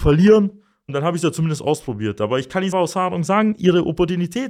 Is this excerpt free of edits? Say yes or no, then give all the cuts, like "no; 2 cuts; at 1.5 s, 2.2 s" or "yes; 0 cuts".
no; 1 cut; at 2.7 s